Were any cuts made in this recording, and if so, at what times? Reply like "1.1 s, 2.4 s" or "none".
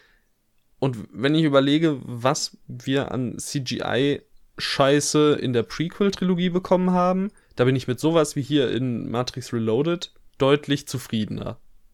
none